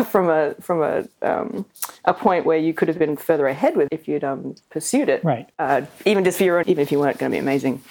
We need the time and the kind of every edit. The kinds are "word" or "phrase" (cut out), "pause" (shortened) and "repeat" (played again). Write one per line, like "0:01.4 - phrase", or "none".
0:03.9 - word
0:05.5 - pause
0:06.6 - word